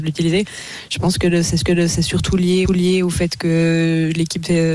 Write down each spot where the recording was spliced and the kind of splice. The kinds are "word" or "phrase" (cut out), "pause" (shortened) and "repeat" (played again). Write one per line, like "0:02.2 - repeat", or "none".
0:01.6 - repeat
0:02.6 - repeat